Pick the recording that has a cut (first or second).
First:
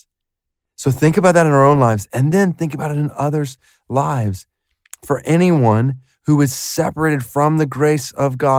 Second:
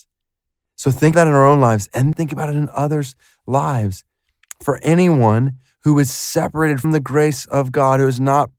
second